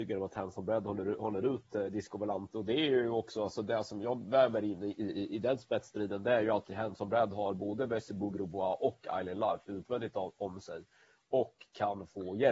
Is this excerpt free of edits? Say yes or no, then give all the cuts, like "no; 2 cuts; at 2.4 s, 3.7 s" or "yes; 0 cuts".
yes; 0 cuts